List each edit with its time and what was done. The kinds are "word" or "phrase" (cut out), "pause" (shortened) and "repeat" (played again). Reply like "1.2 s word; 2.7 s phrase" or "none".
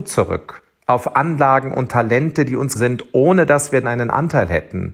2.8 s word; 3.8 s word